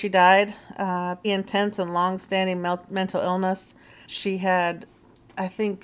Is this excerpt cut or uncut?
cut